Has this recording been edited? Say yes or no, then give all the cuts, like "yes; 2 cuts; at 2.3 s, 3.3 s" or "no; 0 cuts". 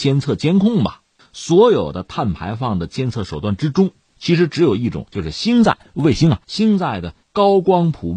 yes; 4 cuts; at 1.2 s, 4.1 s, 6.4 s, 7.2 s